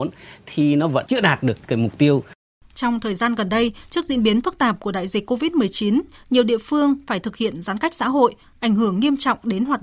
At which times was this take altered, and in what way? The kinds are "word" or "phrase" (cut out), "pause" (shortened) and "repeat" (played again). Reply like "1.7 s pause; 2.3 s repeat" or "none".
none